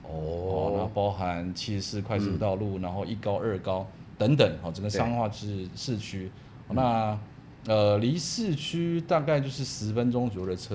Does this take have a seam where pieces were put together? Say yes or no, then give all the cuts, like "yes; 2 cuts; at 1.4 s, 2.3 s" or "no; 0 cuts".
no; 0 cuts